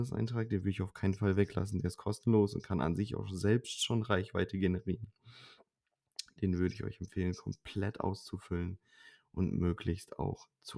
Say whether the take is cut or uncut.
uncut